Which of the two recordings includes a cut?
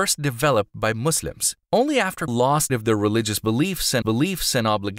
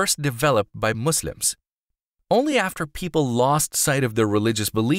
first; 4 cuts; at 1.6 s, 2.3 s, 2.7 s, 4.0 s

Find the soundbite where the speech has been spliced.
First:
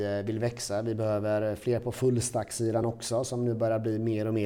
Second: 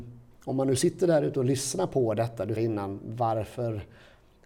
second; 1 cut; at 2.6 s

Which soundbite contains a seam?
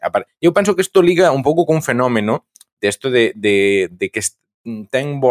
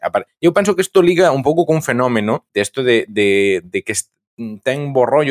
second; 1 cut; at 2.5 s

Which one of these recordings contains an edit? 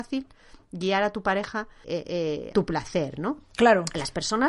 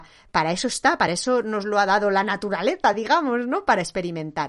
first; 2 cuts; at 1.8 s, 2.5 s

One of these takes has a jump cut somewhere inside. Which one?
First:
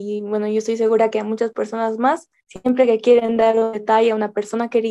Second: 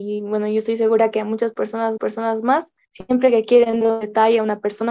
second; 2 cuts; at 2.0 s, 3.8 s

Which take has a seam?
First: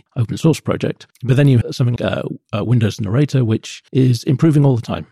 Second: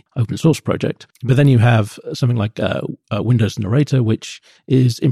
first; 3 cuts; at 1.6 s, 2.0 s, 3.9 s

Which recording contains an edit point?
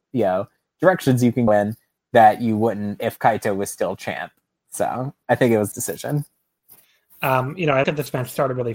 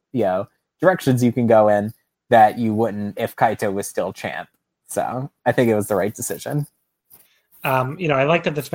first; 3 cuts; at 1.5 s, 5.7 s, 7.8 s

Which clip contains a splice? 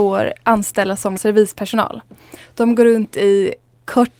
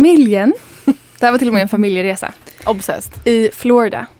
first; 1 cut; at 1.2 s

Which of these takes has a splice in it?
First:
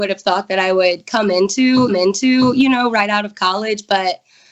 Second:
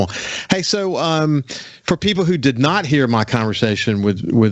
first; 1 cut; at 1.9 s

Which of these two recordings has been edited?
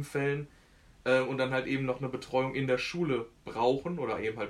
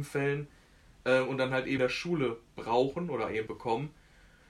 second; 2 cuts; at 1.8 s, 3.5 s

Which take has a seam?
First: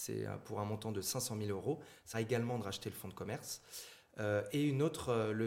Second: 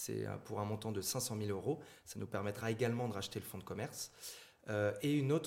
first; 1 cut; at 2.1 s

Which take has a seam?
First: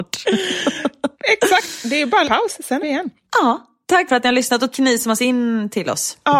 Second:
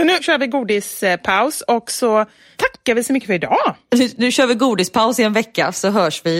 first; 6 cuts; at 1.1 s, 2.2 s, 2.8 s, 4.1 s, 4.7 s, 5.2 s

